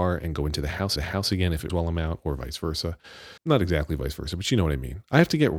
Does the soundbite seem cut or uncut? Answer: cut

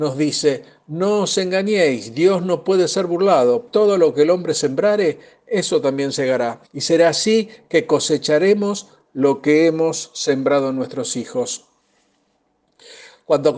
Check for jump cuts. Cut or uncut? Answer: cut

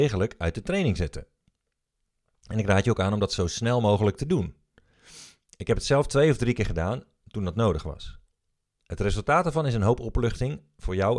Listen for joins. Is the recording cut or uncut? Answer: uncut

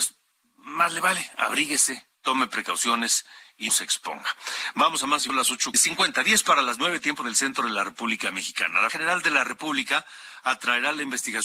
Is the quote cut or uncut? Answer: cut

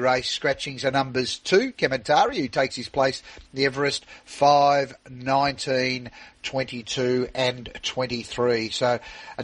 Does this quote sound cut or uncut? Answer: uncut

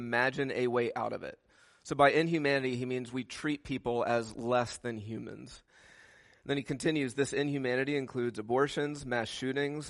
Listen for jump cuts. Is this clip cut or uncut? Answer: uncut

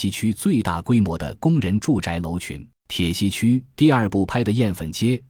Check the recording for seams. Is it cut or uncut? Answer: cut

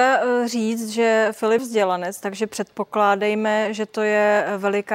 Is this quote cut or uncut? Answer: cut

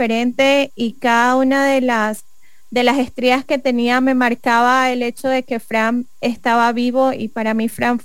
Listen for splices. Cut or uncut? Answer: uncut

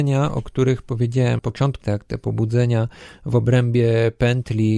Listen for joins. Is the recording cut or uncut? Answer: cut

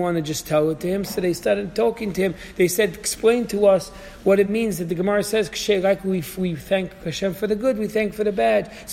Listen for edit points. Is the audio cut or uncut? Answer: uncut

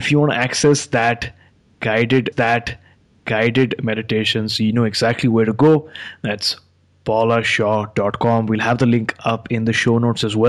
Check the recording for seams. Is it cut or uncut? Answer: cut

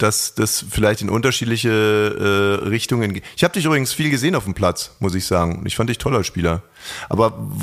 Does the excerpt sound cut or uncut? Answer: uncut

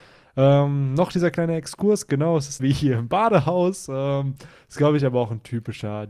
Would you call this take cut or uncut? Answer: cut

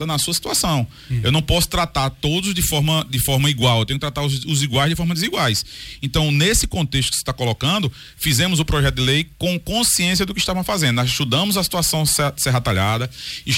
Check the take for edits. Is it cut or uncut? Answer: uncut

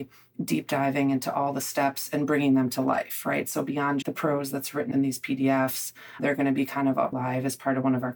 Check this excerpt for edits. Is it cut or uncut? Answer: cut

